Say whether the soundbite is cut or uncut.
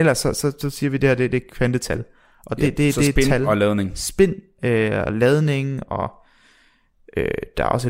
uncut